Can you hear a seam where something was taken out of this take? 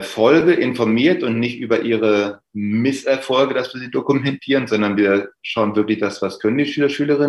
no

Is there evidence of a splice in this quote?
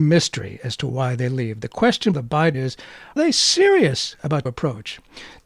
yes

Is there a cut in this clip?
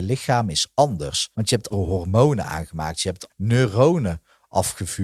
yes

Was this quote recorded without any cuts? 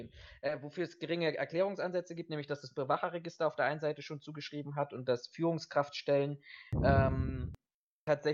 yes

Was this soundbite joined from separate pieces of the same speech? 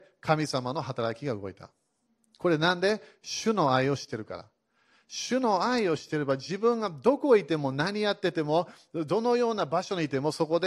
no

